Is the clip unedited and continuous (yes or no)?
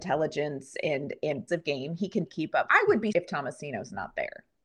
no